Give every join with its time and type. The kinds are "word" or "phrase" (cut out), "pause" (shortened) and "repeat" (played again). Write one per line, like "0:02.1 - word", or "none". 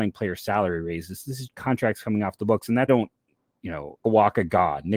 0:01.5 - word
0:02.9 - phrase
0:04.0 - word